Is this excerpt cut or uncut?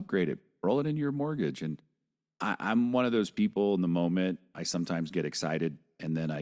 uncut